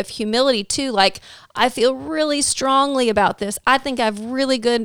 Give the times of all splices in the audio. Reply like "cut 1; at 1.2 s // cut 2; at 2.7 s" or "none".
none